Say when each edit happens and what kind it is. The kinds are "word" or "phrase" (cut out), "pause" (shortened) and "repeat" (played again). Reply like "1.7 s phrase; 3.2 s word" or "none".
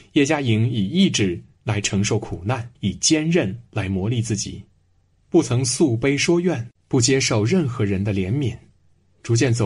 2.7 s pause